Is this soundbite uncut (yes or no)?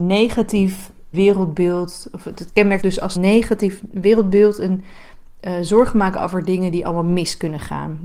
no